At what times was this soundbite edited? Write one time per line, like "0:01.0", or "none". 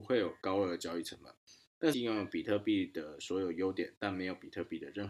0:01.9